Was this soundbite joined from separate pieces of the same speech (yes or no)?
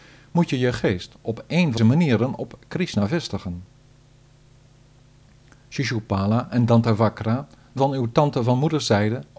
yes